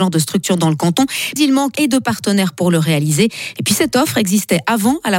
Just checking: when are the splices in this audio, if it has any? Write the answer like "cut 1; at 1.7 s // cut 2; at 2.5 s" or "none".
cut 1; at 1.4 s // cut 2; at 1.7 s